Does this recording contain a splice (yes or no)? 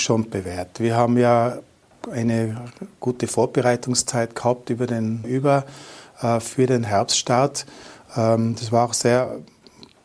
yes